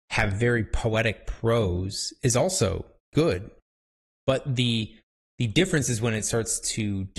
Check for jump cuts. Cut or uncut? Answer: uncut